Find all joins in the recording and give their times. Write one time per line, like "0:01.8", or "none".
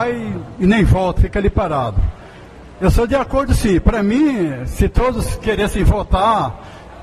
0:01.2